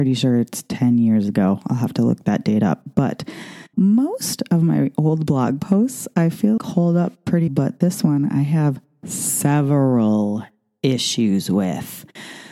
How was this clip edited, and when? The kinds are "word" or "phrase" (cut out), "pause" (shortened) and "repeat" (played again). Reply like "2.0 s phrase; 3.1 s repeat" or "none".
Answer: 3.7 s word; 6.6 s word; 7.5 s word